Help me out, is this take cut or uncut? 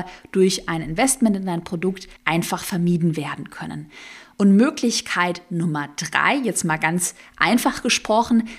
cut